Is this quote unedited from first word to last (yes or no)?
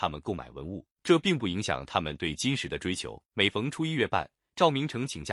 no